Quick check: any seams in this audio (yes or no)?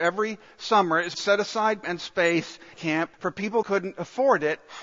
yes